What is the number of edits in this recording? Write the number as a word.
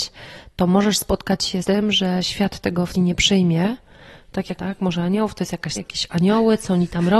four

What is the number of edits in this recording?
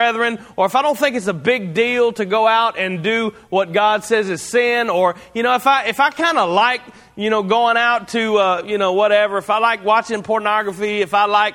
zero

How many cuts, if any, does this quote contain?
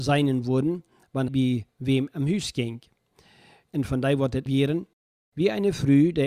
two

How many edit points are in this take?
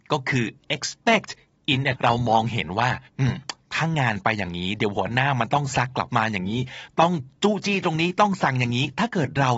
two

